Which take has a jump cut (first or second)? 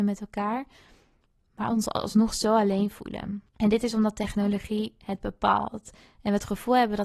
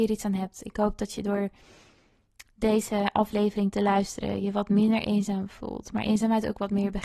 first